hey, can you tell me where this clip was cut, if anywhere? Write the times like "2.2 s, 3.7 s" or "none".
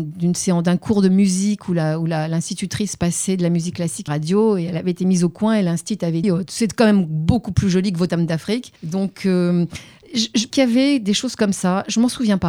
4.1 s, 6.2 s, 8.1 s, 8.8 s, 10.5 s